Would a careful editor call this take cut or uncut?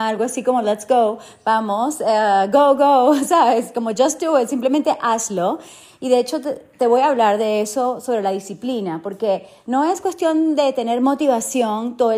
uncut